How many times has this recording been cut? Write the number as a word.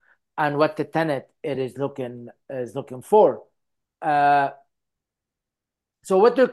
zero